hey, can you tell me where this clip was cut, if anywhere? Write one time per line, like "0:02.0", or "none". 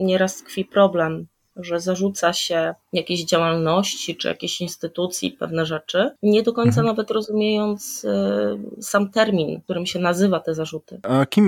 none